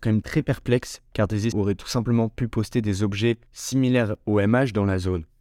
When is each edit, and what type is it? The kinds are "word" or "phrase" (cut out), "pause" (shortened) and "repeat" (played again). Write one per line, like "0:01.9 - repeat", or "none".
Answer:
0:01.5 - word
0:03.5 - pause